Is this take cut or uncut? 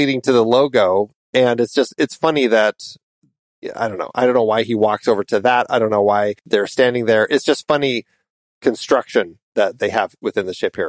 cut